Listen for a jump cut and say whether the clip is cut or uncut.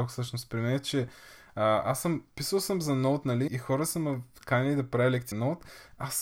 cut